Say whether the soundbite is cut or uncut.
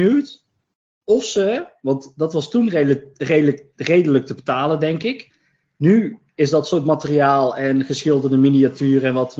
uncut